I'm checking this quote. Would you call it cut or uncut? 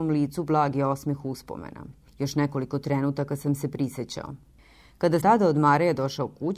cut